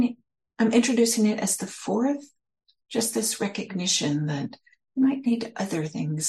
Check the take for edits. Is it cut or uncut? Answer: uncut